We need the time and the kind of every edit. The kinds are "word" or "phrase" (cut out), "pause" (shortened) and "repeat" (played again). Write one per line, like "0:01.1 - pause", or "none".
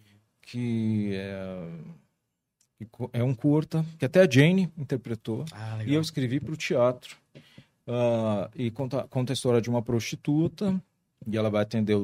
none